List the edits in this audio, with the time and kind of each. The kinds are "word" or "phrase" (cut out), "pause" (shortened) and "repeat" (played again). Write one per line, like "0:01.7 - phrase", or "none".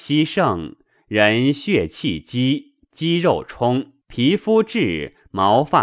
0:04.0 - pause